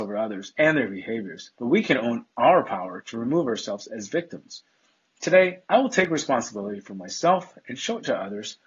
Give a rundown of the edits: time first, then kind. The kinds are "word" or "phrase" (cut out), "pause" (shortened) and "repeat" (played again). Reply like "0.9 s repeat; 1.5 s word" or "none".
1.5 s pause; 5.6 s pause